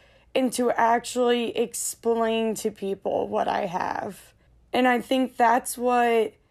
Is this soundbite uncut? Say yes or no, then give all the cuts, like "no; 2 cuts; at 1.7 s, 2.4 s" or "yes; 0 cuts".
no; 1 cut; at 4.5 s